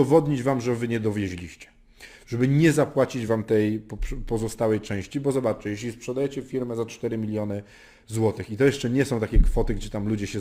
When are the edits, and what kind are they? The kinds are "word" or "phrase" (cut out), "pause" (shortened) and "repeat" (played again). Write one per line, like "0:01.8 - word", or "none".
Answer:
none